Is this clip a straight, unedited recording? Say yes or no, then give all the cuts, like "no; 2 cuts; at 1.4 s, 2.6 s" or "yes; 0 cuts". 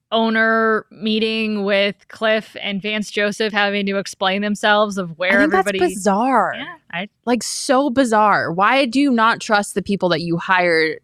yes; 0 cuts